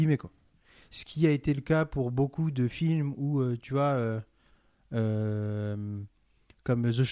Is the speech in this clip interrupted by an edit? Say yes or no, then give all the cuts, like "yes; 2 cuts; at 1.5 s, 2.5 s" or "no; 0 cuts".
no; 0 cuts